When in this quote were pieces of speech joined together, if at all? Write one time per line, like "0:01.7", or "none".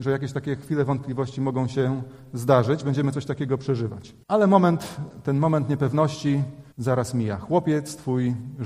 0:04.2
0:06.7